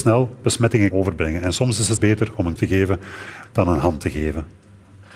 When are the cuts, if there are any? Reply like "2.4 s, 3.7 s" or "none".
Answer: 0.9 s, 2.0 s, 2.6 s, 3.4 s